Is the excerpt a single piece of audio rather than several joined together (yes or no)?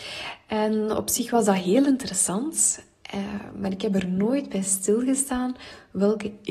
yes